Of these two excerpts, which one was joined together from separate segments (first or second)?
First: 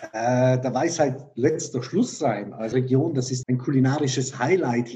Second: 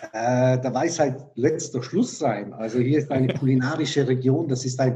first